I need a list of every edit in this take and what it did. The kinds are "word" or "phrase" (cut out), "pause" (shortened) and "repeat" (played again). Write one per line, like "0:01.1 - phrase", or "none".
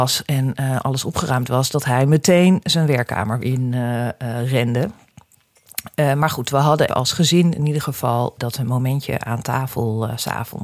0:03.4 - word
0:06.9 - word
0:08.4 - word